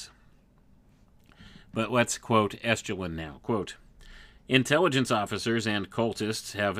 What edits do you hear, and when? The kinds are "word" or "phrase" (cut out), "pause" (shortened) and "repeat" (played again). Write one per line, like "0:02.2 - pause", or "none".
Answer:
none